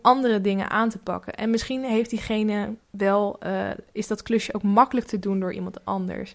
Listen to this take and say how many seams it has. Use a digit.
1